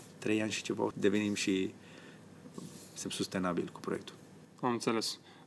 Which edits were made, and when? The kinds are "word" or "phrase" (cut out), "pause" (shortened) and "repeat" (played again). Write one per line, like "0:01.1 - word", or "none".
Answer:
0:00.9 - word
0:03.0 - word

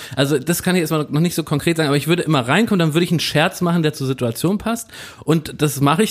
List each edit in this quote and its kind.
none

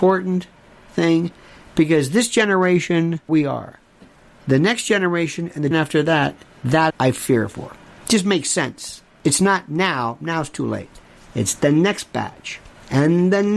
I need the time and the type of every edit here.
0:03.3 - phrase
0:05.7 - word
0:06.9 - phrase

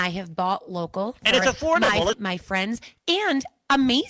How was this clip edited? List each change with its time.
0:02.1 - word
0:03.0 - pause

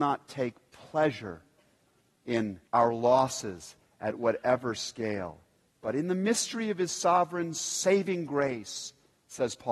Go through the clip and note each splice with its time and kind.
0:02.7 - pause

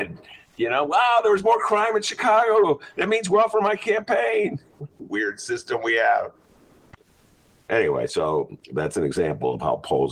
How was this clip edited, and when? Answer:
none

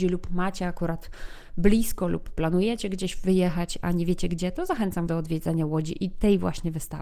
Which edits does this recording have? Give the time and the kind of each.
0:05.1 - word

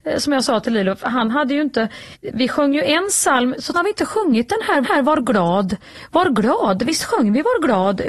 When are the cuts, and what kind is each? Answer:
0:02.1 - pause
0:03.7 - phrase
0:04.8 - repeat

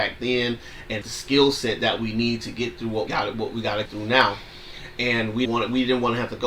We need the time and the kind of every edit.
0:01.0 - word
0:03.1 - word
0:03.9 - word
0:05.5 - word

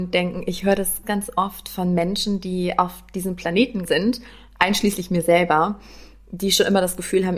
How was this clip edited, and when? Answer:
0:01.0 - word
0:03.9 - word

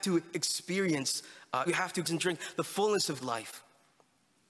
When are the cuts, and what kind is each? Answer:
0:01.7 - word
0:02.0 - word
0:03.2 - word

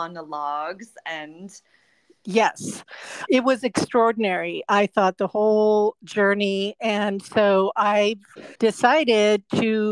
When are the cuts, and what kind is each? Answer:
0:03.3 - word
0:08.6 - pause

